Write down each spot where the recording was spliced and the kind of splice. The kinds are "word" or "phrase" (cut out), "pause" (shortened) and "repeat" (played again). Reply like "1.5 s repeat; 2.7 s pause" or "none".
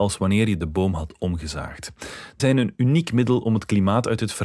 2.4 s word